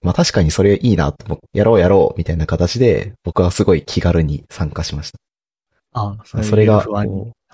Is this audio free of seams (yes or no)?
no